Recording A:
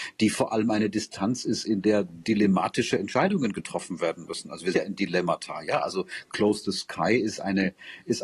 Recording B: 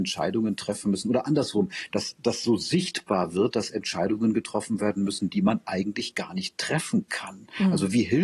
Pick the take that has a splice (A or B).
A